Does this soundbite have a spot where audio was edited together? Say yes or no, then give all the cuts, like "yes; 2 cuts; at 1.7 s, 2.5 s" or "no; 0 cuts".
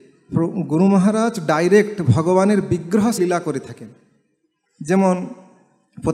yes; 1 cut; at 3.2 s